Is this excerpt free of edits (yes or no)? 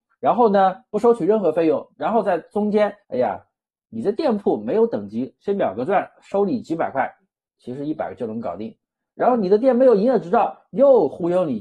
no